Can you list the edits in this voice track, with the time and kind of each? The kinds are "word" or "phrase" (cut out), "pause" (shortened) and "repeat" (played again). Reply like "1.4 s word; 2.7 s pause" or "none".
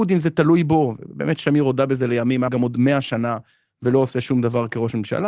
2.5 s word

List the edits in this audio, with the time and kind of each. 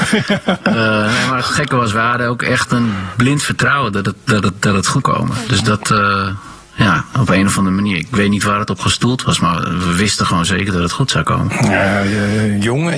5.0 s word

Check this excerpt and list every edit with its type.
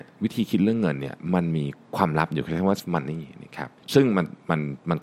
2.8 s word; 3.8 s pause

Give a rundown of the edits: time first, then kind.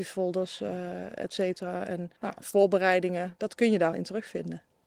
2.2 s pause; 3.9 s word

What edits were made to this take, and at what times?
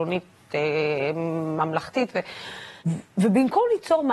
2.8 s pause

